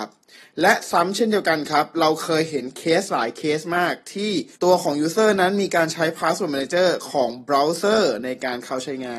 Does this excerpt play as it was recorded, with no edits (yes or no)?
no